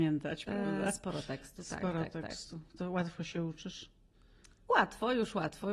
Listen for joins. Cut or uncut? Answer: uncut